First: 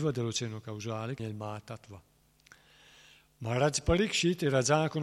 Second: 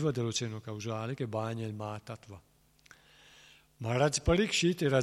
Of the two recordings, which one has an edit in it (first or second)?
first